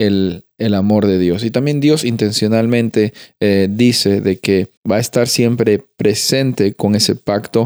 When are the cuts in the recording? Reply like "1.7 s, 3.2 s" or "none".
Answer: 4.8 s